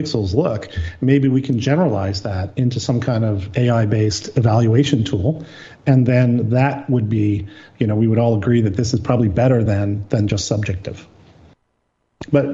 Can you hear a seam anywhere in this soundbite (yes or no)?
no